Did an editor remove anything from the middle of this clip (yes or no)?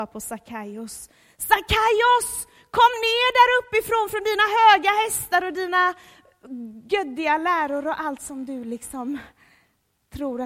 no